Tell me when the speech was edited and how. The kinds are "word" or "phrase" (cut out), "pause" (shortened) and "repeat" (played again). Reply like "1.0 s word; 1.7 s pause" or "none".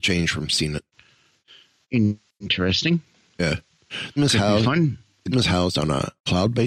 4.2 s word; 5.3 s word